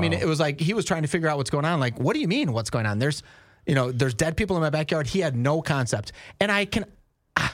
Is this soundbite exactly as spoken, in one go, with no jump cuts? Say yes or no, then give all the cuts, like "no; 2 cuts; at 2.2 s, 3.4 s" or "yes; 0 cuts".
yes; 0 cuts